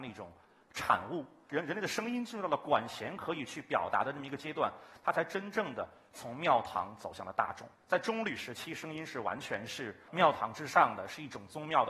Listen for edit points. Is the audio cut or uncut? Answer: cut